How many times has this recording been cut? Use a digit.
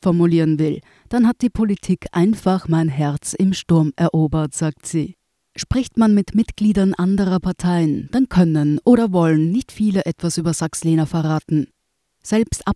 1